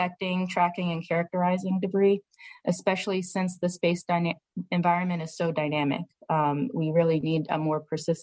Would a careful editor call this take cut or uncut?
uncut